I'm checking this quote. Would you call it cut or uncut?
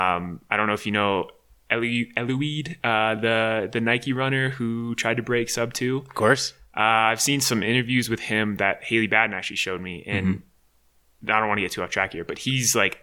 uncut